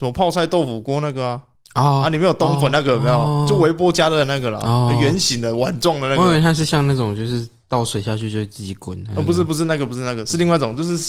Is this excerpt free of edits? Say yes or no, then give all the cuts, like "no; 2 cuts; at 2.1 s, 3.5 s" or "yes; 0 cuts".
yes; 0 cuts